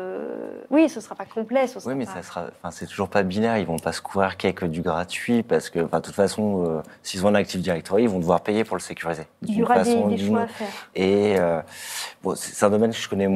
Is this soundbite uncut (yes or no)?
yes